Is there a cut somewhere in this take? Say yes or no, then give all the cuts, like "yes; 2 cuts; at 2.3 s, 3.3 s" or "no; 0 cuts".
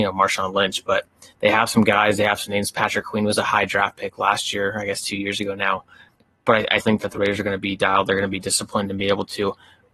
yes; 1 cut; at 6.8 s